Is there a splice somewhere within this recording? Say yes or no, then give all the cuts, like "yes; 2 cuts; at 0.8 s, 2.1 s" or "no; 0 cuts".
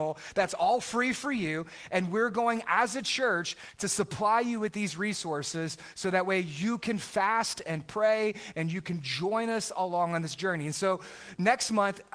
no; 0 cuts